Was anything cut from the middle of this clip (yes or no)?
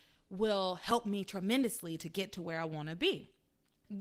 no